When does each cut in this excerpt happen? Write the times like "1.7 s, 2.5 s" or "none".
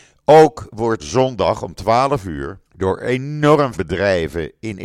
1.0 s, 2.7 s, 3.7 s